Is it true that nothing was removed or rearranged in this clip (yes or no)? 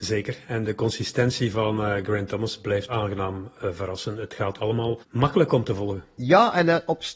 no